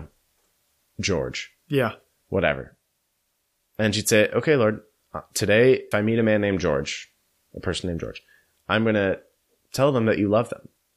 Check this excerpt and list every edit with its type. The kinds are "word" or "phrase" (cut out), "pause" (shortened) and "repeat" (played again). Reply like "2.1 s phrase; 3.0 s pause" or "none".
5.9 s word